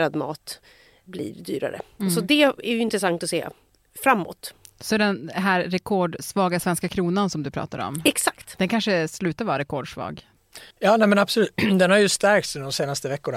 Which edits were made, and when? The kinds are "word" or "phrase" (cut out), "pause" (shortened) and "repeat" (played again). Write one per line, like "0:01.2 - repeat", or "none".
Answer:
0:10.7 - pause